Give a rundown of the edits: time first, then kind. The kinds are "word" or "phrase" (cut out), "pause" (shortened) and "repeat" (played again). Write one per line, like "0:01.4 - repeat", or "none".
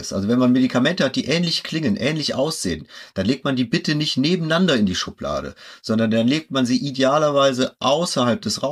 none